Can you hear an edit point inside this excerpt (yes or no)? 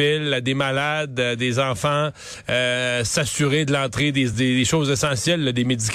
no